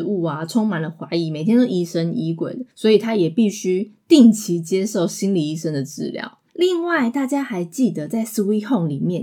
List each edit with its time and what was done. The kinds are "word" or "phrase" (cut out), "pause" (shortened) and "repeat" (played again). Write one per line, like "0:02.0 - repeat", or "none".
0:02.7 - pause
0:06.5 - pause